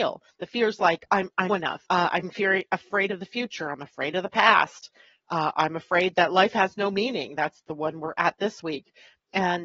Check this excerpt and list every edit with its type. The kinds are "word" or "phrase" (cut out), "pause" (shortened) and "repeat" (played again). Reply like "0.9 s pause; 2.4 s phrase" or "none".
1.5 s phrase; 1.9 s pause